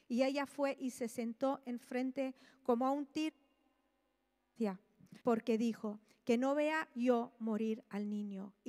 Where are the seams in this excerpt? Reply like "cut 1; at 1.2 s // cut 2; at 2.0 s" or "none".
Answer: cut 1; at 5.2 s